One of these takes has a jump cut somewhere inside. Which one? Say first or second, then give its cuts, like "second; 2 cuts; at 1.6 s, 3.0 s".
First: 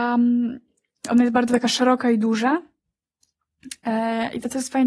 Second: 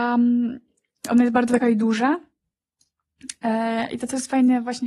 second; 1 cut; at 1.6 s